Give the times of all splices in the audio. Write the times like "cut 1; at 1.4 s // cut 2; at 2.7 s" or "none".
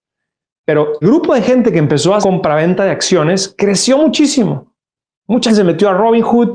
cut 1; at 1.0 s // cut 2; at 2.2 s // cut 3; at 5.5 s